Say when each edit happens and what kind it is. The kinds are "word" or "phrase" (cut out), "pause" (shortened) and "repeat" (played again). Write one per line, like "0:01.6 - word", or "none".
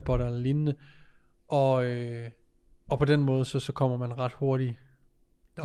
none

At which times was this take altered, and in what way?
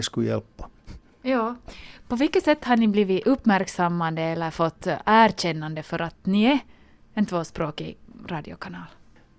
none

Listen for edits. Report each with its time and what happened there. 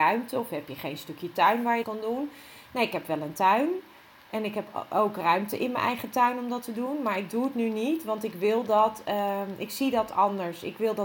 0:01.8 - word

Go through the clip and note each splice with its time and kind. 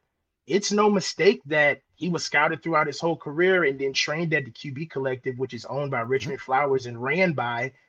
0:01.9 - pause

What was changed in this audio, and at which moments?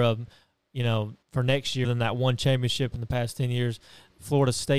0:01.2 - pause
0:01.8 - word

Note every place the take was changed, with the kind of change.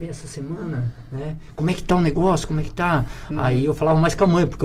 none

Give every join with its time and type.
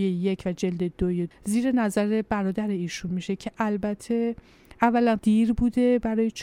0:01.3 - word
0:03.1 - word
0:05.2 - phrase

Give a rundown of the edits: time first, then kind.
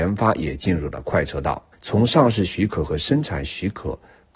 0:01.7 - pause

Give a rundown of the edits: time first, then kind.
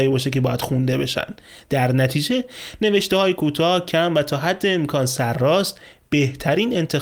none

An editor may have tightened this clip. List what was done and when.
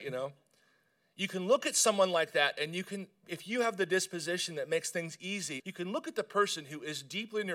0:05.6 - phrase

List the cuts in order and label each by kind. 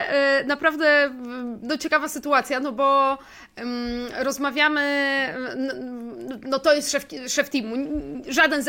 none

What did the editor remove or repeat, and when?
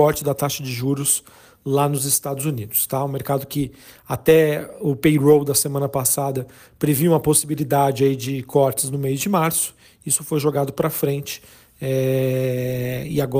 none

